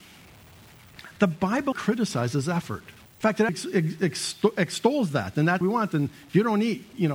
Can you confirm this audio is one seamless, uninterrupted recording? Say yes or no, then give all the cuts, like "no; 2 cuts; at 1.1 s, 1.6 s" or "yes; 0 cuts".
no; 4 cuts; at 1.7 s, 3.1 s, 3.5 s, 5.6 s